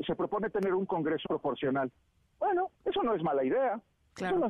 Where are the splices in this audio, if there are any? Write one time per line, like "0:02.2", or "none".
0:01.2
0:02.7